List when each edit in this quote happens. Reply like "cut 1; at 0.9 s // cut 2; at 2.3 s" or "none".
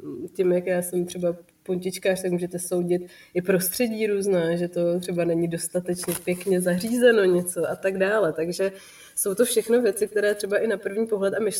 none